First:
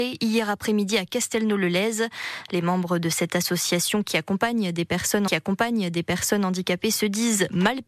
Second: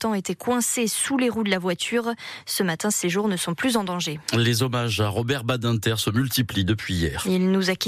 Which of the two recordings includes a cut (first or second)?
first